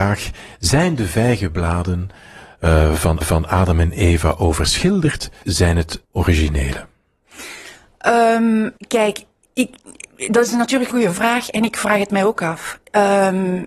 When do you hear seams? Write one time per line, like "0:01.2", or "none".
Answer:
0:03.2
0:05.4
0:06.0
0:08.8
0:10.9